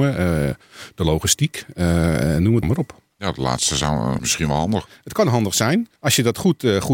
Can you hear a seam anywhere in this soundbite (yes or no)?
yes